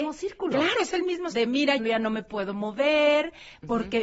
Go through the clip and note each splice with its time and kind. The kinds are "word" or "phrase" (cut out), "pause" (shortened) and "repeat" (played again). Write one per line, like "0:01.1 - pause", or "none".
0:01.3 - word
0:01.8 - word